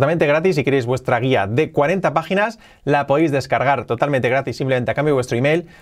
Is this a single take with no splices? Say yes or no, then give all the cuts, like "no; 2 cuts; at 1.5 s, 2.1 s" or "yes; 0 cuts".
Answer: yes; 0 cuts